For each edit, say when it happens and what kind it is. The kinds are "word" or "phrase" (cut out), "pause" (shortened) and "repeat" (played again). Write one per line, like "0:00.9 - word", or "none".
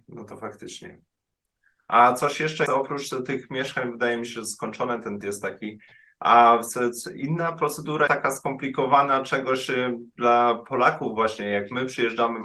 0:02.7 - word
0:05.2 - word
0:08.1 - word